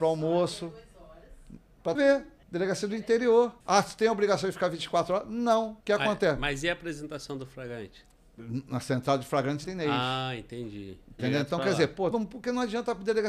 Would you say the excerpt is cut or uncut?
cut